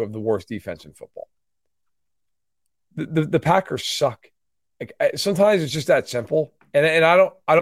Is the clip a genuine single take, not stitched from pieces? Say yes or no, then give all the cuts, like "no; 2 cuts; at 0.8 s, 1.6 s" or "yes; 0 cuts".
yes; 0 cuts